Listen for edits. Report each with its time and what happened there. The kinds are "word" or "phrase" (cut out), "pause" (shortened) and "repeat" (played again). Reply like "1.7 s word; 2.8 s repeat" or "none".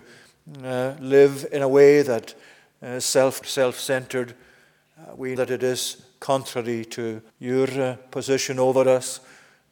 3.4 s phrase; 5.4 s word; 7.3 s pause